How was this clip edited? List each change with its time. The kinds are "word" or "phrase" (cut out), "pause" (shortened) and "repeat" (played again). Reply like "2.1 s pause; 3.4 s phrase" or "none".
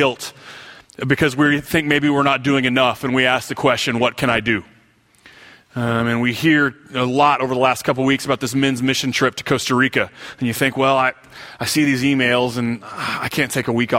none

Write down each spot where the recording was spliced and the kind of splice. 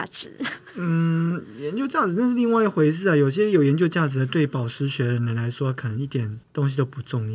6.4 s pause

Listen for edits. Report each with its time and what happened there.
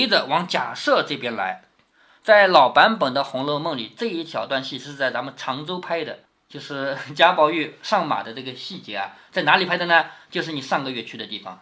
6.2 s pause

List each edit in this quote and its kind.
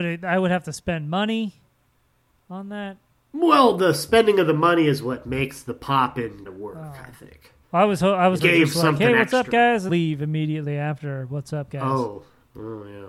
6.5 s word; 7.6 s pause; 8.4 s phrase; 9.9 s word

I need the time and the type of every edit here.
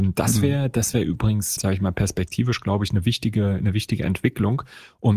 1.6 s word

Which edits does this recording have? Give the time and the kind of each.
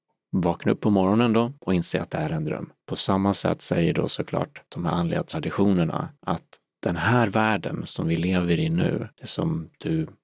1.6 s pause; 2.8 s pause; 4.7 s pause; 6.2 s pause; 9.1 s pause

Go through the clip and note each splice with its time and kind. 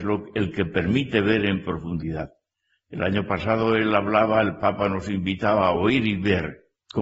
none

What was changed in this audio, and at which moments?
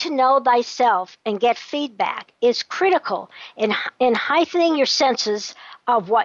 none

